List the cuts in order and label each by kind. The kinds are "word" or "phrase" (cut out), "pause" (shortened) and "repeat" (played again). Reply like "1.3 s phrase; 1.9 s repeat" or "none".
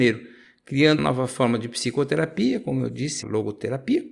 1.0 s word; 3.2 s word